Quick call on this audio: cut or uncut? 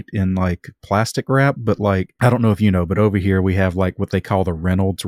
uncut